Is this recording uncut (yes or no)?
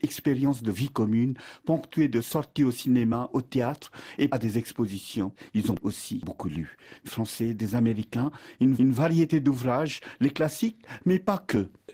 no